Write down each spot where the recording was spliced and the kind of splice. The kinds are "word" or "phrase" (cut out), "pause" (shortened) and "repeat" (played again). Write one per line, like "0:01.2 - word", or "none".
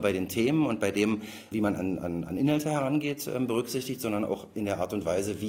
0:01.5 - word